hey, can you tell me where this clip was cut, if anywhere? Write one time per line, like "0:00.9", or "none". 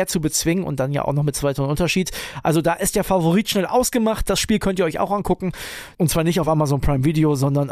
none